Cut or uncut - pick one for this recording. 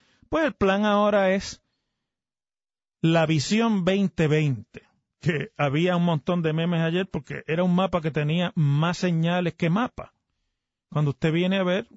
uncut